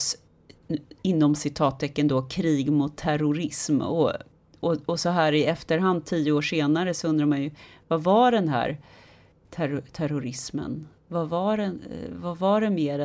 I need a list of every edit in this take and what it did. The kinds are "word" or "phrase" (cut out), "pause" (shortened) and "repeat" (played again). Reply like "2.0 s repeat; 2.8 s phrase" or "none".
none